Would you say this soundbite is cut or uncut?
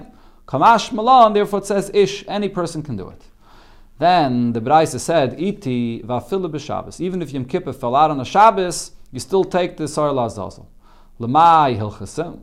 uncut